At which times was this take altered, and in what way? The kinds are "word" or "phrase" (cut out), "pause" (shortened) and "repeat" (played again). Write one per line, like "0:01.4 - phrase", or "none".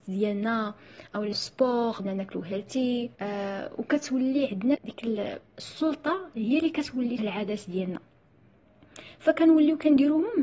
0:01.3 - word
0:02.0 - word
0:03.1 - pause
0:04.7 - word
0:07.2 - word